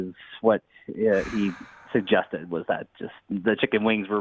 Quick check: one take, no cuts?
yes; 0 cuts

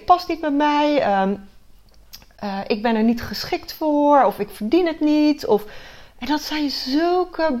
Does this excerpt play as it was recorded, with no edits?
yes; 0 cuts

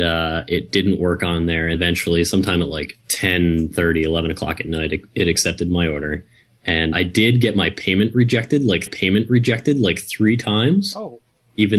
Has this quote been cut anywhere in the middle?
yes; 4 cuts; at 1.7 s, 3.0 s, 6.9 s, 8.9 s

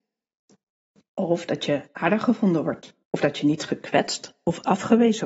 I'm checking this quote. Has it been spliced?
yes; 1 cut; at 3.0 s

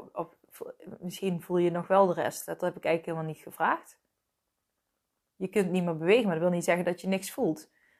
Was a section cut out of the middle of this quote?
no; 0 cuts

